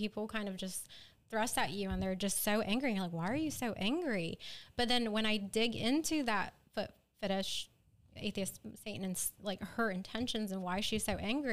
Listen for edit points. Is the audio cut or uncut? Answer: uncut